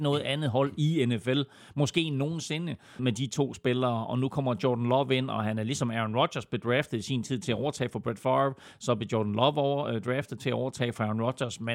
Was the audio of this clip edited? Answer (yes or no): yes